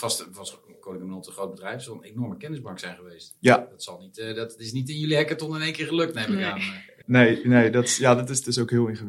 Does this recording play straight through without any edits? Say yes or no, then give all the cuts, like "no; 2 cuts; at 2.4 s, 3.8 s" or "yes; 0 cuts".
no; 1 cut; at 7.0 s